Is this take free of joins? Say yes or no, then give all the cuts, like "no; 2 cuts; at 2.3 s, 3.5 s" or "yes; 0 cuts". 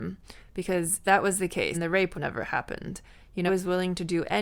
no; 4 cuts; at 1.0 s, 1.7 s, 2.1 s, 3.5 s